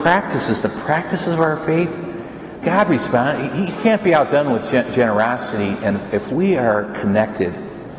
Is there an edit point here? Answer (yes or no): yes